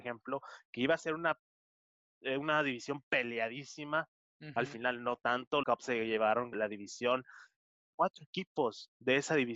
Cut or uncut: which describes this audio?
cut